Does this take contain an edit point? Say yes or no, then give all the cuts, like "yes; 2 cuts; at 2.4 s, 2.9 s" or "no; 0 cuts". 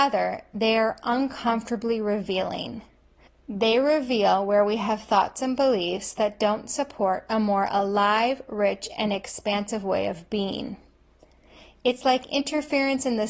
no; 0 cuts